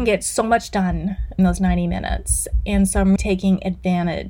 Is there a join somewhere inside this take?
yes; 2 cuts; at 1.4 s, 3.2 s

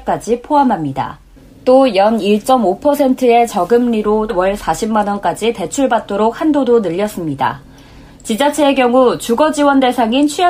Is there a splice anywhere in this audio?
yes; 2 cuts; at 1.4 s, 4.3 s

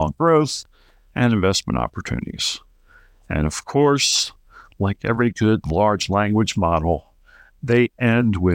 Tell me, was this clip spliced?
no; 0 cuts

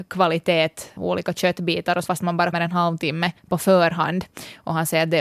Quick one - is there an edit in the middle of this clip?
yes; 4 cuts; at 1.0 s, 2.1 s, 2.5 s, 3.4 s

